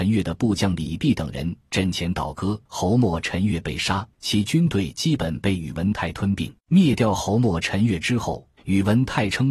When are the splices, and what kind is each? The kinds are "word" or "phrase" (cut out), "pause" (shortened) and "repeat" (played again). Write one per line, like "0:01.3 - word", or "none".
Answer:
0:02.7 - pause
0:04.1 - pause
0:06.6 - pause
0:08.6 - pause